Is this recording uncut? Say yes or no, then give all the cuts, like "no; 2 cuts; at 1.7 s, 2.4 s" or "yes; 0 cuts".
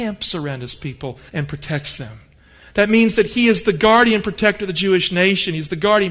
no; 1 cut; at 1.3 s